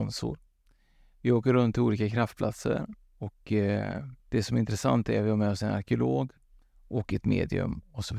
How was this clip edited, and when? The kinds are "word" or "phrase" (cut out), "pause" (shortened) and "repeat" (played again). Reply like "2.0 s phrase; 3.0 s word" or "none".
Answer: 4.2 s pause